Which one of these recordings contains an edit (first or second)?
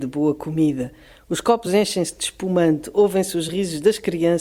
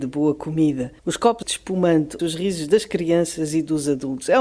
second